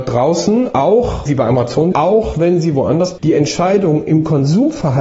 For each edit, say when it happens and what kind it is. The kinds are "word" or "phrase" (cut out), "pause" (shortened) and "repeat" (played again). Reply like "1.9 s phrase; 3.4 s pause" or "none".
1.3 s word; 1.9 s word; 3.2 s word

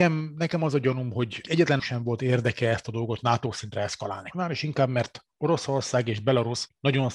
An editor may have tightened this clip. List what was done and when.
1.8 s phrase

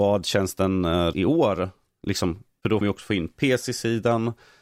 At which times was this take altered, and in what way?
1.1 s word; 2.8 s word

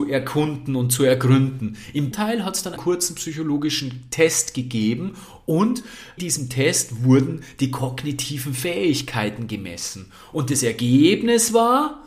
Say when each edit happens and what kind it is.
2.1 s word; 2.8 s word; 6.2 s word

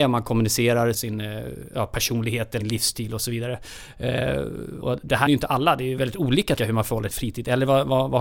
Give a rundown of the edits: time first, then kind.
0.9 s word; 2.6 s word; 4.8 s word; 5.3 s word; 6.6 s word; 7.1 s word

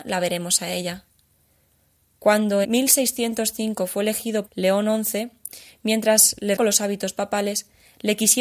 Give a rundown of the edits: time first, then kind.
2.6 s word; 4.5 s word; 6.6 s word

